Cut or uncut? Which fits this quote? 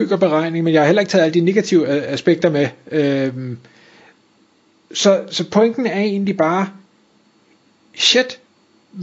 uncut